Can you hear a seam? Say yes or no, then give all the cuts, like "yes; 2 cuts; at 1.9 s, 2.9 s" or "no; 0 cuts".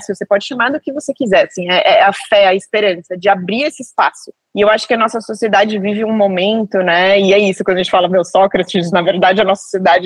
no; 0 cuts